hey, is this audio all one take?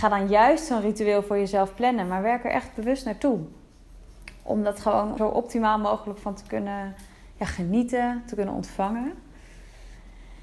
no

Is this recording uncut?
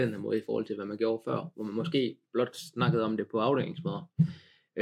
yes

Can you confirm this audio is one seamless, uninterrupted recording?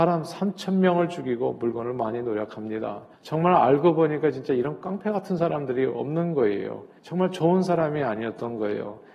no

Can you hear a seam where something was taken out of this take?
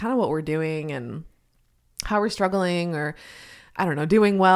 no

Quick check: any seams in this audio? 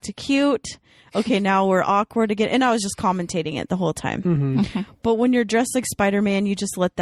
no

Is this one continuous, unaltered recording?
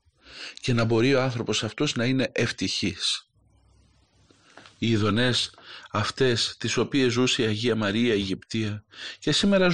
yes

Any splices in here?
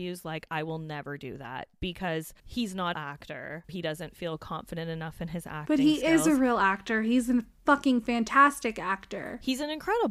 yes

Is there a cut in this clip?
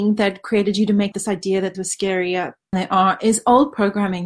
yes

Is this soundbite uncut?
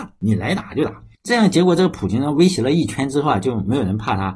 no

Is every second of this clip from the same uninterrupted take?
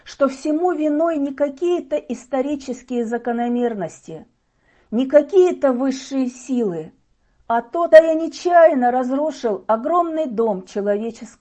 no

